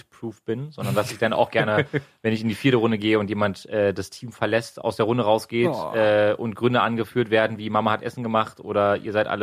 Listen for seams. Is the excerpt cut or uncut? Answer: uncut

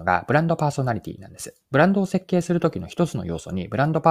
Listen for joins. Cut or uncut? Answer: cut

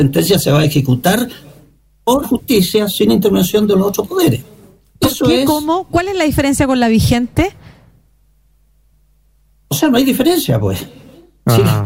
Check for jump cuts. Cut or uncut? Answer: cut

